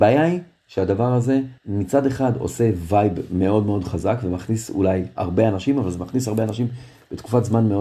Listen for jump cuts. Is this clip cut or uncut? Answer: cut